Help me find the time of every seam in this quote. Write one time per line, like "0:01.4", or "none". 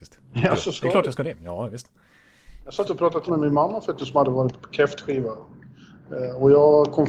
0:02.8
0:03.3
0:04.0

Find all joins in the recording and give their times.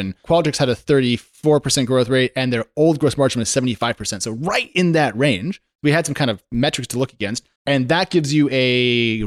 0:07.6

